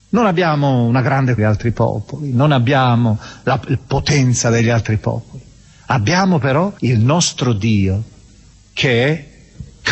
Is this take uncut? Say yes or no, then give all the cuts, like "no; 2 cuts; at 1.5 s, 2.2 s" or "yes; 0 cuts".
no; 2 cuts; at 1.4 s, 6.8 s